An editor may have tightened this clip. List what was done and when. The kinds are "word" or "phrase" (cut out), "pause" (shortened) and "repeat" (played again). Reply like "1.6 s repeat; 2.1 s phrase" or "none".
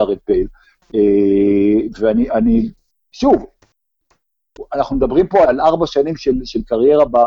5.5 s word